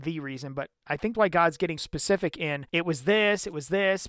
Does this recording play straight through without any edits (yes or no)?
no